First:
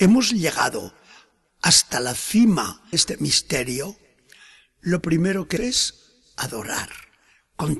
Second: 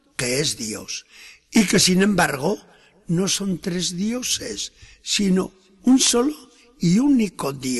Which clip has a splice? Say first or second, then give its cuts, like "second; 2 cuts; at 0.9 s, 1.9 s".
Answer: first; 2 cuts; at 2.9 s, 5.6 s